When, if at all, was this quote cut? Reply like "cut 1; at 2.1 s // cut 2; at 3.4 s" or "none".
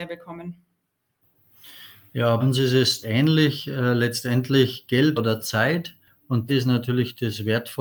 cut 1; at 2.4 s // cut 2; at 3.0 s // cut 3; at 5.2 s // cut 4; at 6.5 s